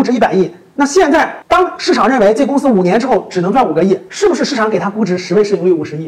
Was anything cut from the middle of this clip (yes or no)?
yes